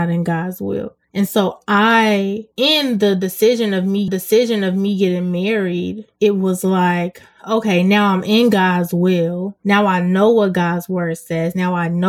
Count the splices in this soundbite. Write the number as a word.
two